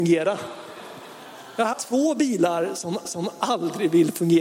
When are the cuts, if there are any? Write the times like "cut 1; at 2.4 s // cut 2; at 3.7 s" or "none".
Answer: cut 1; at 1.7 s // cut 2; at 3.0 s